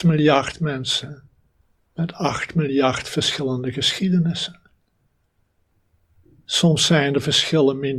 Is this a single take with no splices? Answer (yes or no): yes